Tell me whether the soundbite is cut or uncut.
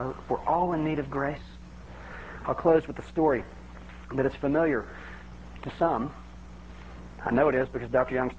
uncut